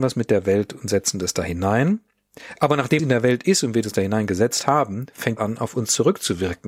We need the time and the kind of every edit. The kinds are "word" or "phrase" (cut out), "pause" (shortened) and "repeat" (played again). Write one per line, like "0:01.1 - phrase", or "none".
0:03.0 - word
0:05.4 - word